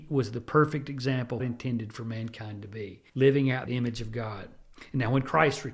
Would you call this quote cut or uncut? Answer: cut